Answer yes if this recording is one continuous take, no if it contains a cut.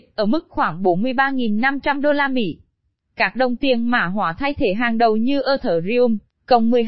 yes